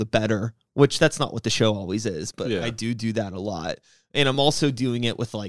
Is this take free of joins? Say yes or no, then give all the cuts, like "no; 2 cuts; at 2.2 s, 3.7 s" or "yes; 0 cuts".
yes; 0 cuts